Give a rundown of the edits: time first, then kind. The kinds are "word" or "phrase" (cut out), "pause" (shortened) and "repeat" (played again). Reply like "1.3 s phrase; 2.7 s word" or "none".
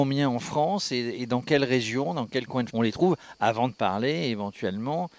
2.7 s word